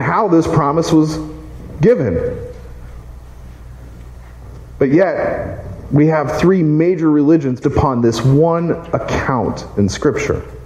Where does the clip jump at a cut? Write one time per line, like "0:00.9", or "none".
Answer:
0:07.6